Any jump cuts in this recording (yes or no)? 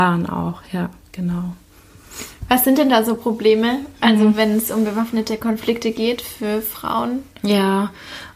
no